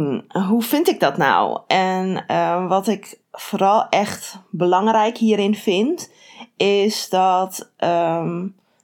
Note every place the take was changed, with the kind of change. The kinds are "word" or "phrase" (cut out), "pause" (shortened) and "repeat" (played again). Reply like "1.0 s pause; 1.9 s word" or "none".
3.2 s pause